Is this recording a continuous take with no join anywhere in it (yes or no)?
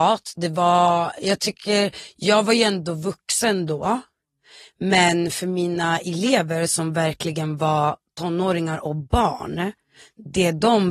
yes